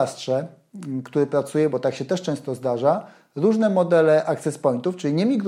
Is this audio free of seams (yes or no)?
yes